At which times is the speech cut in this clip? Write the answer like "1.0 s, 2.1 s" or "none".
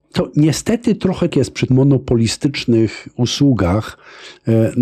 1.3 s, 1.7 s

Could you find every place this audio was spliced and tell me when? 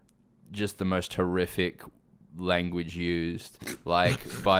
none

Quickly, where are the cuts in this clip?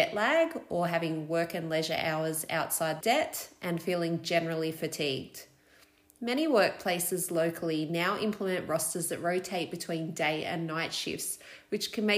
3.0 s

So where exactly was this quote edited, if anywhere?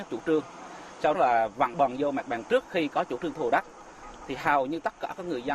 1.1 s, 1.7 s, 2.5 s

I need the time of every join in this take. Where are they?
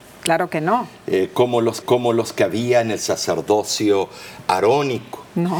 1.8 s

